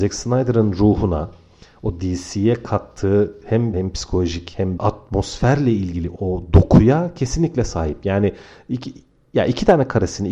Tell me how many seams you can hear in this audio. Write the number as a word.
three